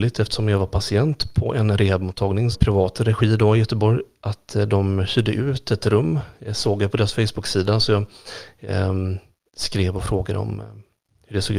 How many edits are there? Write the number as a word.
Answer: one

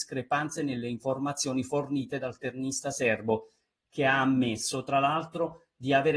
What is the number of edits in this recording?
zero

